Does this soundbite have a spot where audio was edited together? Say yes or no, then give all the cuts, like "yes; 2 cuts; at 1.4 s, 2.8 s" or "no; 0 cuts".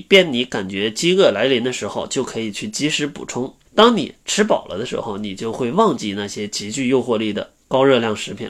yes; 1 cut; at 3.7 s